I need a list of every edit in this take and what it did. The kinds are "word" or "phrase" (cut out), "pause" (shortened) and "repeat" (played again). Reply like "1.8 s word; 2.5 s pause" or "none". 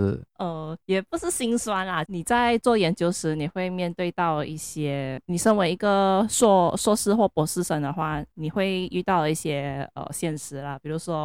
2.1 s phrase